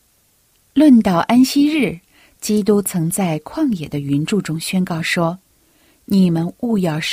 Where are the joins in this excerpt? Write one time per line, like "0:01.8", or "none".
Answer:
none

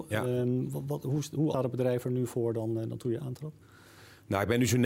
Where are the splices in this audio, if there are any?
0:01.5

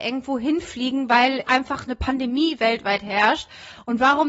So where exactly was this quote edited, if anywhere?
0:01.4

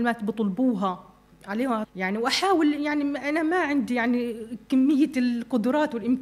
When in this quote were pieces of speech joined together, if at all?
0:01.8

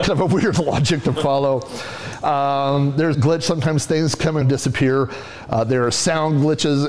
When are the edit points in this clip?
0:03.1
0:04.4

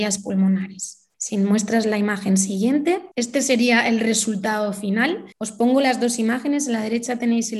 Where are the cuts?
0:01.1
0:03.1
0:05.3

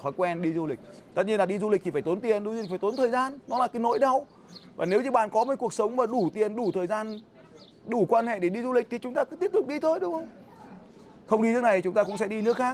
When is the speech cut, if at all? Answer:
none

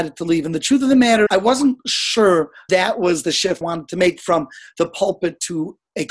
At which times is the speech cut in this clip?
0:01.3
0:02.7
0:03.6

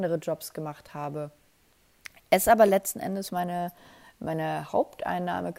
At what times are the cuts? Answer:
none

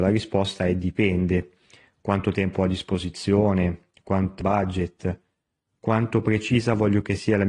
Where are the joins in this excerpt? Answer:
0:04.4

